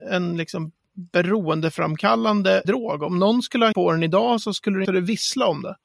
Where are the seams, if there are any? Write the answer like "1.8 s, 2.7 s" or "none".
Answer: 2.6 s, 3.7 s, 4.8 s